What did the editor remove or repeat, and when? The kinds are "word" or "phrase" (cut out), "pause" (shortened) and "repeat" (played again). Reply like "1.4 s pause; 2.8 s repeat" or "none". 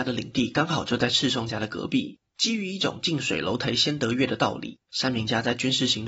2.3 s pause; 4.8 s pause